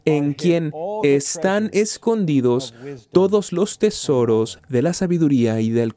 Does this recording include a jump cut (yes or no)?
no